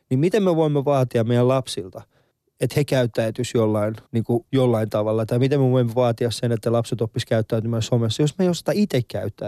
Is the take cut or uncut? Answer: cut